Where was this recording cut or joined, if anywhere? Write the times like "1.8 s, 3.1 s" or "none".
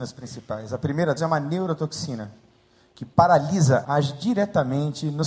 1.2 s, 3.8 s